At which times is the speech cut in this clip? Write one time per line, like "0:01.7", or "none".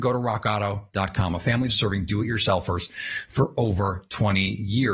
0:01.7